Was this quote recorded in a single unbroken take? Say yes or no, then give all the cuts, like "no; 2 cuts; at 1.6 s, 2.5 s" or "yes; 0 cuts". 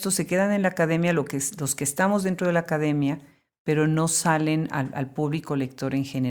yes; 0 cuts